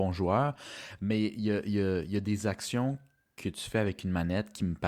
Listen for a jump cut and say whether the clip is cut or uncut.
uncut